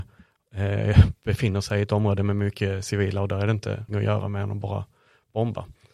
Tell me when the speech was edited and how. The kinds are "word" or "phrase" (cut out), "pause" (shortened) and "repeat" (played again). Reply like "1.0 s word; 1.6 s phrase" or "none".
3.9 s word